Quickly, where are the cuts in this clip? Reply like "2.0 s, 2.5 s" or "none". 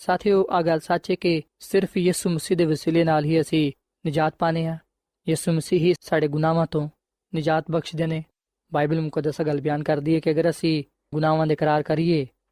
1.5 s, 6.0 s, 11.1 s